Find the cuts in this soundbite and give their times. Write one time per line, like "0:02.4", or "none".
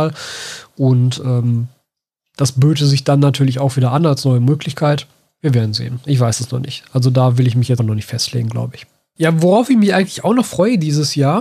0:07.8

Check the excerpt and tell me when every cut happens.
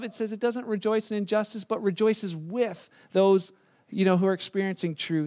none

